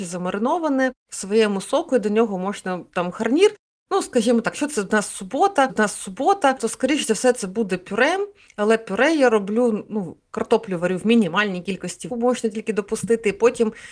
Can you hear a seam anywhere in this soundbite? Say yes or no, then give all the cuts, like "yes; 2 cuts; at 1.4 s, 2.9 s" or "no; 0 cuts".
yes; 2 cuts; at 5.7 s, 12.1 s